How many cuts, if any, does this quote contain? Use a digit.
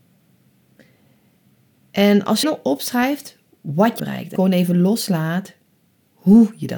3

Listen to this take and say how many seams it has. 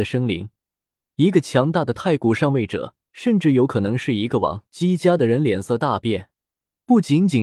2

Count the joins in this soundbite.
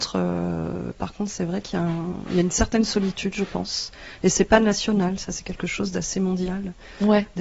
0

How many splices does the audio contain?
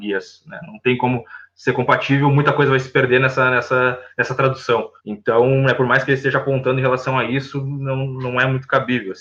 1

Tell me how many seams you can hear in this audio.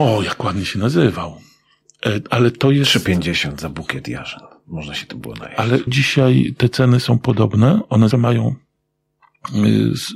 2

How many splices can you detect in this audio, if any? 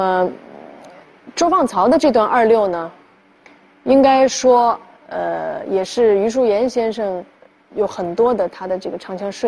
0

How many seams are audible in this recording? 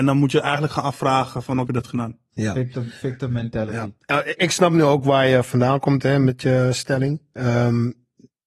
2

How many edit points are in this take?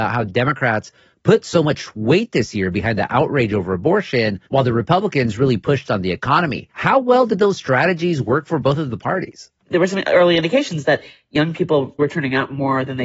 3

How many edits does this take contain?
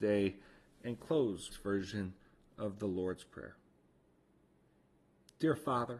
1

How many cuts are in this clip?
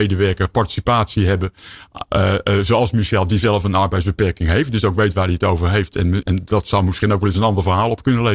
1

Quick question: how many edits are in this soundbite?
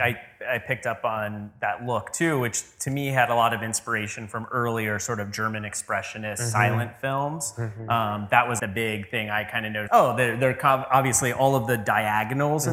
2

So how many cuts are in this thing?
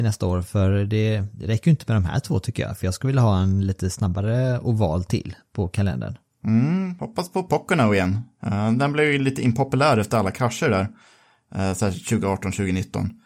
0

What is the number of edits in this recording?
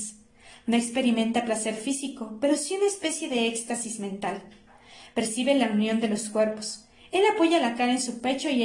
0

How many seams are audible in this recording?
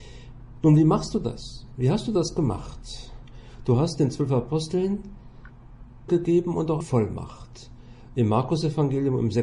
2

